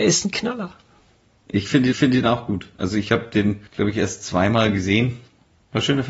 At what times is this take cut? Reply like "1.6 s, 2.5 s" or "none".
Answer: 1.9 s, 3.7 s